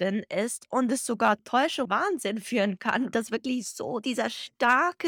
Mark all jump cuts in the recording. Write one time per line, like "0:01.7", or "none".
0:01.4
0:01.9
0:03.1

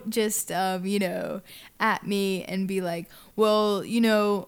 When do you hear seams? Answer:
none

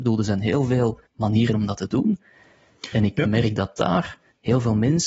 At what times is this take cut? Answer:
0:01.1

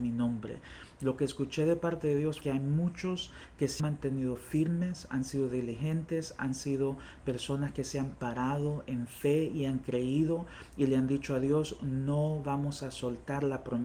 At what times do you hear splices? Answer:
0:02.4
0:03.8

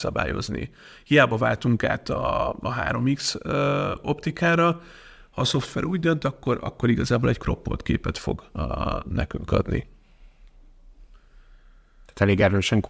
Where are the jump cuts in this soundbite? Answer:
none

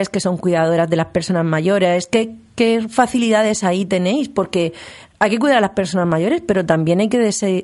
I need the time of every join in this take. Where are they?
none

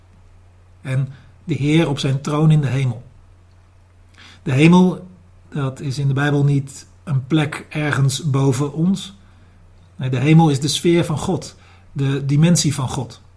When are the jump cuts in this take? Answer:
none

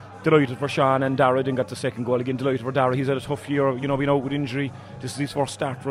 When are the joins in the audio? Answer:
none

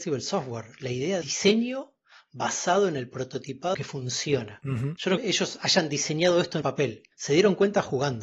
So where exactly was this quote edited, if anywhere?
0:01.2
0:03.7
0:05.2
0:06.6
0:07.1

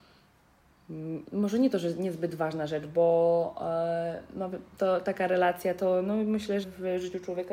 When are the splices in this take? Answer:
0:06.6

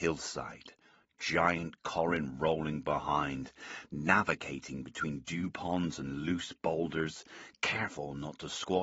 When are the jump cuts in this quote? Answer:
none

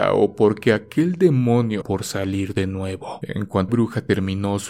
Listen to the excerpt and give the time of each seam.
0:01.8
0:03.7

